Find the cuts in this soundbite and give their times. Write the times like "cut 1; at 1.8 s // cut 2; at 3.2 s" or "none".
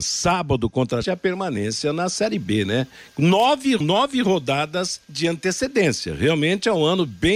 cut 1; at 1.0 s // cut 2; at 3.8 s // cut 3; at 5.0 s